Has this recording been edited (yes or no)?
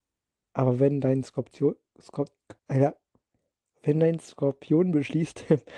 yes